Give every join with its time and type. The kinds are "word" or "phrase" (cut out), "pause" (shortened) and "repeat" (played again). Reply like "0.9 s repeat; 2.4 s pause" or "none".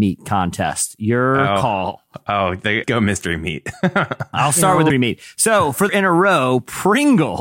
2.8 s word; 4.9 s word; 5.9 s phrase